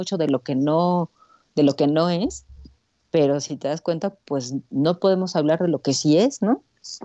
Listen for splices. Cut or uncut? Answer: uncut